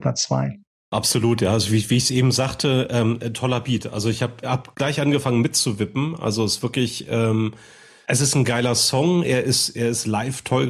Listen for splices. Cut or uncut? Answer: uncut